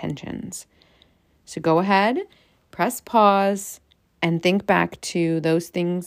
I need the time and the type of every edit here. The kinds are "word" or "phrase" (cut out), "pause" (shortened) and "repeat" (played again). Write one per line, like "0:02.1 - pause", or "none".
none